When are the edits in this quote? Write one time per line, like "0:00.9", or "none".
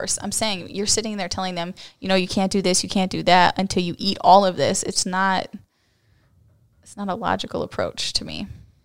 none